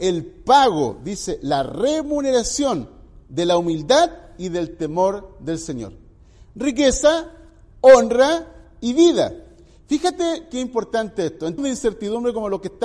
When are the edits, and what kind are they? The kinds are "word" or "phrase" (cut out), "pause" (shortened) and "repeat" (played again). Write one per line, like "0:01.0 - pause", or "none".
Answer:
0:11.6 - word